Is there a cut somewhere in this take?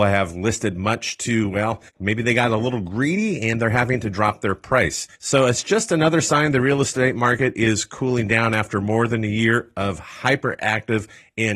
yes; 2 cuts; at 1.9 s, 5.1 s

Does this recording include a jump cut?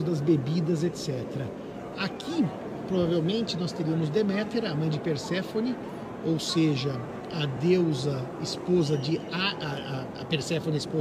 no; 0 cuts

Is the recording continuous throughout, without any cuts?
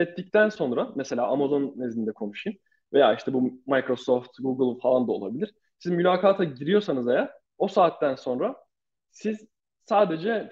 yes; 0 cuts

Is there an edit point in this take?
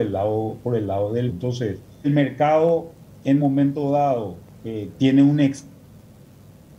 yes; 4 cuts; at 1.3 s, 2.0 s, 3.4 s, 4.5 s

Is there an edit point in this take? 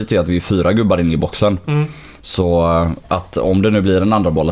no; 0 cuts

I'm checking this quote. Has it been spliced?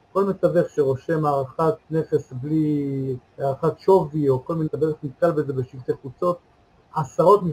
yes; 3 cuts; at 1.8 s, 3.2 s, 4.7 s

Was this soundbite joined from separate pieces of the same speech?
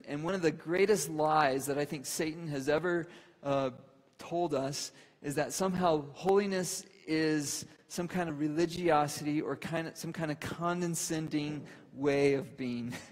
no; 0 cuts

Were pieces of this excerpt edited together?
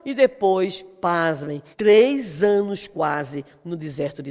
yes; 1 cut; at 1.7 s

